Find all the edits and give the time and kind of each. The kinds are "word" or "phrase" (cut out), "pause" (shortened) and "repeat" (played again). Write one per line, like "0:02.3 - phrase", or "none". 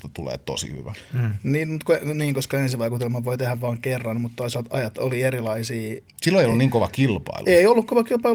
none